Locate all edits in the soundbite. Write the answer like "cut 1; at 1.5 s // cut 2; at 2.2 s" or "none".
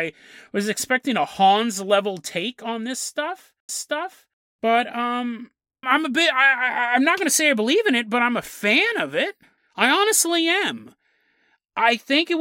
cut 1; at 3.7 s // cut 2; at 5.8 s // cut 3; at 9.6 s

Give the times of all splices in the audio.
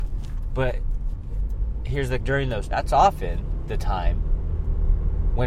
cut 1; at 2.2 s // cut 2; at 2.7 s

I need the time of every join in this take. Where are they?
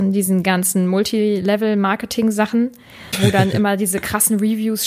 none

